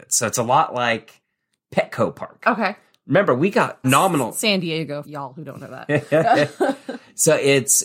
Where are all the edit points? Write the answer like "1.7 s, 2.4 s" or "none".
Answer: 3.8 s, 5.0 s